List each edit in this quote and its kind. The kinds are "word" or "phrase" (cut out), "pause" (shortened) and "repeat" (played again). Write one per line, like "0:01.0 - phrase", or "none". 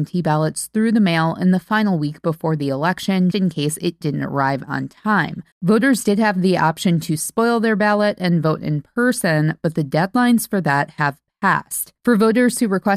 0:03.3 - word
0:05.5 - pause